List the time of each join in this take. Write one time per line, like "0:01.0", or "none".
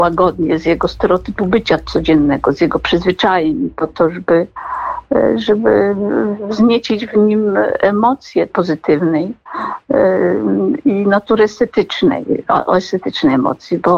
0:08.5